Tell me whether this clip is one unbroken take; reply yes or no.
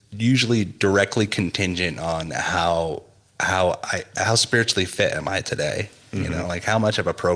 yes